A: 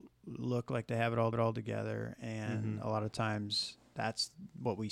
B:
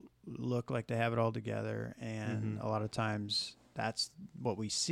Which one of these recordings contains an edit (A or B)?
A